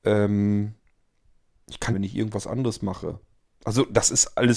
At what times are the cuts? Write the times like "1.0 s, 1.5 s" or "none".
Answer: 1.9 s